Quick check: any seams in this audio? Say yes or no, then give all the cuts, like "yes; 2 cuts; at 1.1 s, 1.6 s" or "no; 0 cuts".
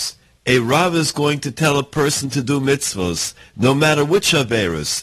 no; 0 cuts